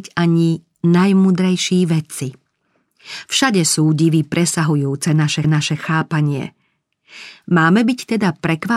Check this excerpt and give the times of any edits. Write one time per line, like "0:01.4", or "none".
0:05.4